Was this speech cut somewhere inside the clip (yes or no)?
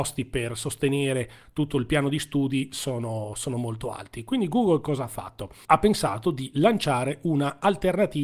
no